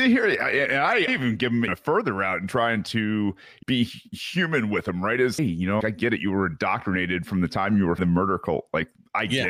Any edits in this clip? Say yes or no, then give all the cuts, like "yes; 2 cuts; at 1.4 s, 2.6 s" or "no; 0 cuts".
yes; 6 cuts; at 1.1 s, 1.7 s, 3.6 s, 5.4 s, 5.8 s, 8.0 s